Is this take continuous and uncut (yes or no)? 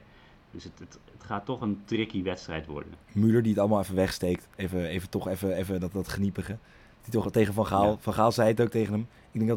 yes